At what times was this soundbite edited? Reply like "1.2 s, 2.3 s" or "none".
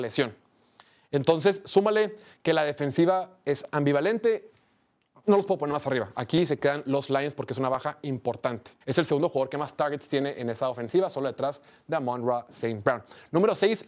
8.8 s